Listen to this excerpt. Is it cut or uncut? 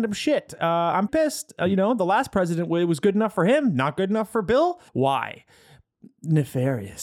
cut